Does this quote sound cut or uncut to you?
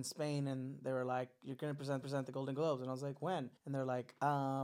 cut